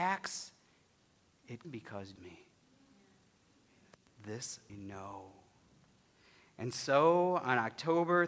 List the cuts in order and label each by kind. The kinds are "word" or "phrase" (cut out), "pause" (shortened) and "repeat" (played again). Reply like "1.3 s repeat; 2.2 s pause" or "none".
1.6 s word; 2.2 s phrase; 4.7 s word